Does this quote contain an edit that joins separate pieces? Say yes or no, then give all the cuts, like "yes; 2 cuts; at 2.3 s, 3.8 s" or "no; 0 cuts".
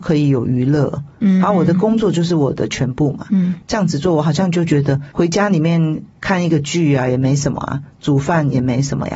no; 0 cuts